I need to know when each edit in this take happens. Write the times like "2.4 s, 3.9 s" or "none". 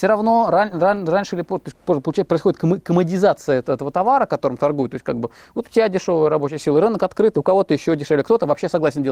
none